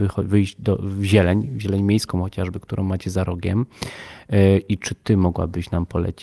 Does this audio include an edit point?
no; 0 cuts

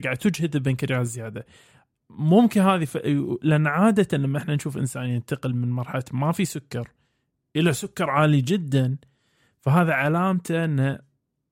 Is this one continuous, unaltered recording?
yes; 0 cuts

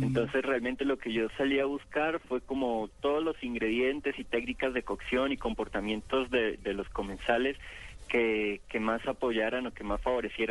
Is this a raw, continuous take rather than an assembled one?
yes; 0 cuts

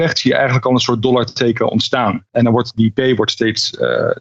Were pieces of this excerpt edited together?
no; 0 cuts

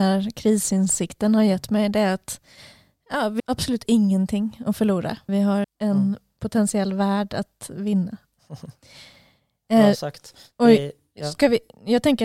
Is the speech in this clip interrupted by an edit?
yes; 3 cuts; at 3.4 s, 5.3 s, 5.6 s

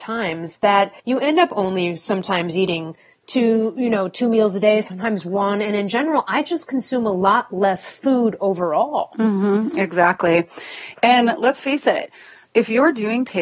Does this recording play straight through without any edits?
no; 1 cut; at 1.0 s

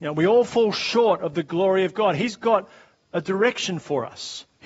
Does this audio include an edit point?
no; 0 cuts

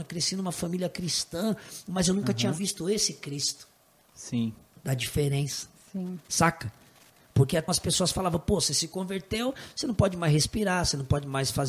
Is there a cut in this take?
yes; 1 cut; at 7.7 s

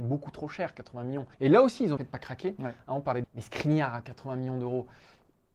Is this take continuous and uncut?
no; 3 cuts; at 1.3 s, 2.0 s, 3.2 s

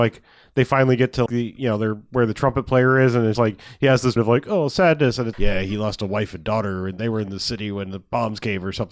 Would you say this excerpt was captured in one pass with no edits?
no; 4 cuts; at 1.3 s, 3.3 s, 4.2 s, 5.3 s

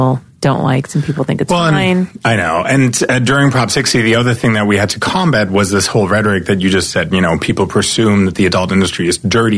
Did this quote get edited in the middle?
no; 0 cuts

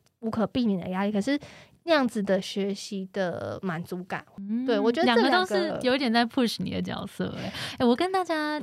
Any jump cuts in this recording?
no; 0 cuts

